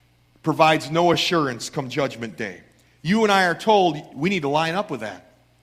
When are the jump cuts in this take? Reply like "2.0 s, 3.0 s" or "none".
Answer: none